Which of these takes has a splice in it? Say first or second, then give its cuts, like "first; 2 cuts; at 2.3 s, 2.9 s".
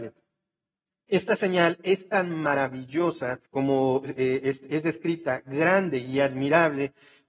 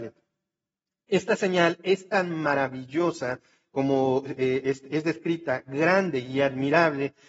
first; 1 cut; at 3.5 s